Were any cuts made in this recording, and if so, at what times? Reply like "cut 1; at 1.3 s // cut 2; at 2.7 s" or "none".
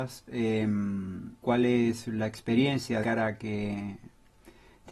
cut 1; at 1.4 s // cut 2; at 3.0 s